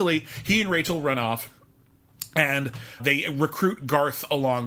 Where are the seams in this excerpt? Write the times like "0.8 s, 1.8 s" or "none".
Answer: 3.0 s